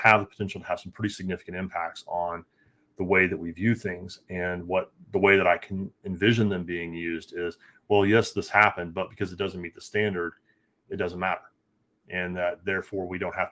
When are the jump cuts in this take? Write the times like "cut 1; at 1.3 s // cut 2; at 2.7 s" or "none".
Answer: none